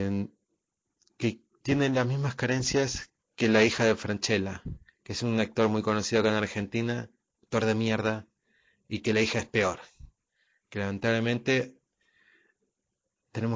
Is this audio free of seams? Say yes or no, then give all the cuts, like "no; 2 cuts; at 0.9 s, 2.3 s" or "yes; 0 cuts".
yes; 0 cuts